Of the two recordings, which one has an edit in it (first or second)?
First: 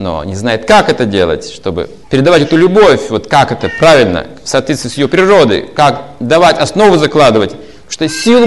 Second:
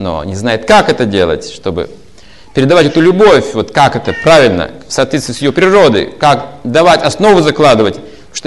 first